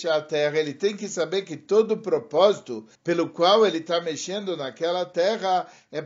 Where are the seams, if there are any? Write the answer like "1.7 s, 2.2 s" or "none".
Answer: 2.9 s